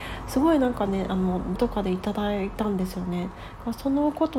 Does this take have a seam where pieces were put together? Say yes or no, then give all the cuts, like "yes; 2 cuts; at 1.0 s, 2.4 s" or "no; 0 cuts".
yes; 1 cut; at 1.6 s